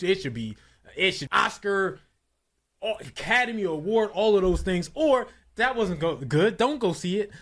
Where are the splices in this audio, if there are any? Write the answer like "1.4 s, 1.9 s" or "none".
1.3 s